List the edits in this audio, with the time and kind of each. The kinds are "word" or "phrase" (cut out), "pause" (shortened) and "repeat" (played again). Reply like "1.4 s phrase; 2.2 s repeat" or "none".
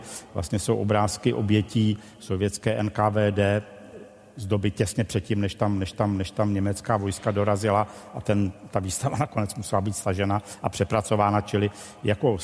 5.9 s repeat